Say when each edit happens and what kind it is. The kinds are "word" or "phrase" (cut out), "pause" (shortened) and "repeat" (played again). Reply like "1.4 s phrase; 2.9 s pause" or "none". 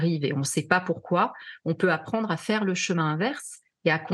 none